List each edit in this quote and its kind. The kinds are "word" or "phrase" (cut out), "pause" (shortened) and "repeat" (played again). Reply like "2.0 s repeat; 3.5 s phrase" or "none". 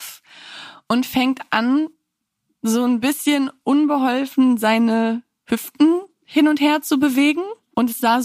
none